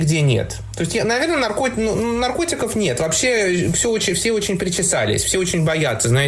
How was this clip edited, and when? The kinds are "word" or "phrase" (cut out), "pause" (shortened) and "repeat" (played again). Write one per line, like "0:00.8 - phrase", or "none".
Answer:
none